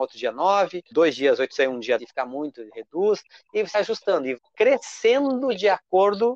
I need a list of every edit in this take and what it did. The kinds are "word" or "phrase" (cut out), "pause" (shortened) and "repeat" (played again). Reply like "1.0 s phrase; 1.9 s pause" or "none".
0.9 s word; 1.5 s word; 2.0 s word; 3.7 s word; 4.4 s word